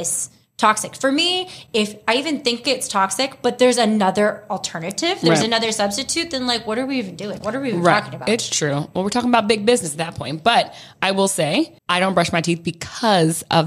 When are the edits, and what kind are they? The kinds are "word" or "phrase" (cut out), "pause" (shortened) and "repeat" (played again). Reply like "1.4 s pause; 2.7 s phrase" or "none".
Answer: 11.8 s pause